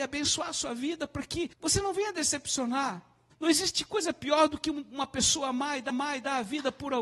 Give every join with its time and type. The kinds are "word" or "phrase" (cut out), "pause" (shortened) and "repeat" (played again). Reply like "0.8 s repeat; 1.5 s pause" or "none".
1.5 s pause; 3.3 s pause; 5.9 s repeat